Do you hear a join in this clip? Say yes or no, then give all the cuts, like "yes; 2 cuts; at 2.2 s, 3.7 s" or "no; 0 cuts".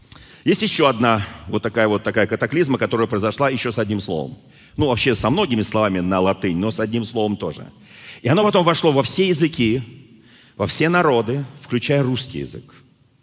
no; 0 cuts